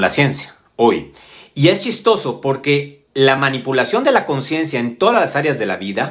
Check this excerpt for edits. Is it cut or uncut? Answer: uncut